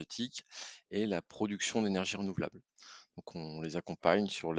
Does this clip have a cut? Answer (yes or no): no